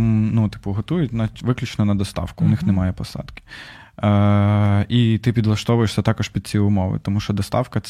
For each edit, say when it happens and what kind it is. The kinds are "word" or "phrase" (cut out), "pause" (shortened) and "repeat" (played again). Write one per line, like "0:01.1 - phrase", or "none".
none